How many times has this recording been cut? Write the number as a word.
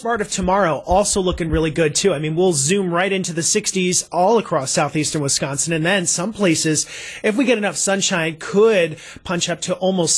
zero